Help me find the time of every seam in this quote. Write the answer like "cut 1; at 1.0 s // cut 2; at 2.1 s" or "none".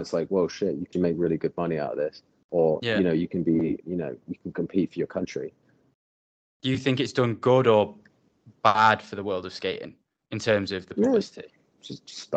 cut 1; at 0.9 s // cut 2; at 3.8 s

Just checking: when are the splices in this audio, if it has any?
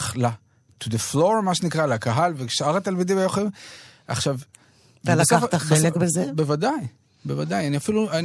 none

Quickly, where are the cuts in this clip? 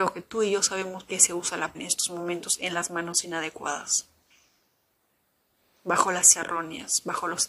cut 1; at 1.1 s // cut 2; at 1.7 s // cut 3; at 6.3 s

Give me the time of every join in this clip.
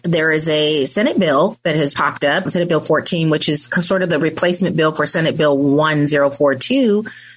cut 1; at 1.9 s // cut 2; at 2.5 s

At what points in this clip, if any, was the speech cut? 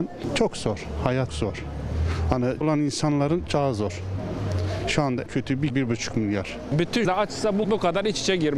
cut 1; at 1.3 s // cut 2; at 2.6 s // cut 3; at 3.5 s // cut 4; at 5.3 s // cut 5; at 5.7 s // cut 6; at 7.0 s // cut 7; at 7.6 s

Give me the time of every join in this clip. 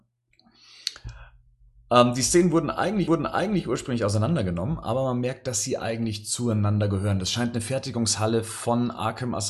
cut 1; at 3.1 s

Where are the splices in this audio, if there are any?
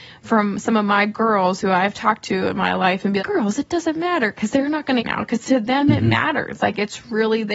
cut 1; at 3.2 s // cut 2; at 5.0 s

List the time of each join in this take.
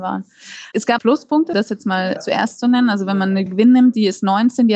cut 1; at 1.0 s // cut 2; at 1.5 s // cut 3; at 3.5 s

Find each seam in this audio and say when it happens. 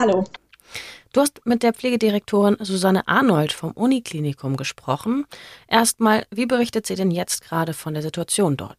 none

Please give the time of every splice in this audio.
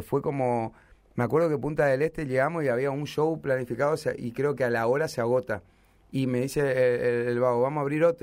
none

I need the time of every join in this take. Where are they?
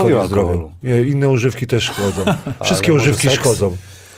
none

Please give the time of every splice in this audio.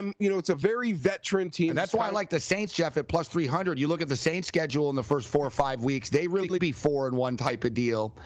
cut 1; at 6.6 s

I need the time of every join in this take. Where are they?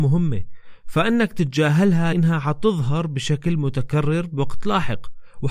cut 1; at 2.1 s

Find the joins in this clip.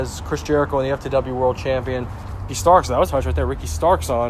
cut 1; at 2.5 s // cut 2; at 3.1 s

